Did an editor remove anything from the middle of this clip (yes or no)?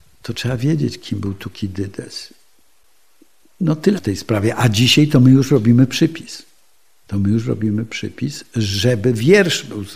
yes